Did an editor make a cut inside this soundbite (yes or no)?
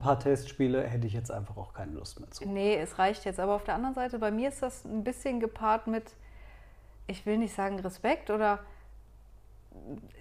no